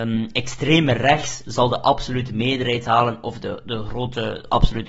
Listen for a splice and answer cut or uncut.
uncut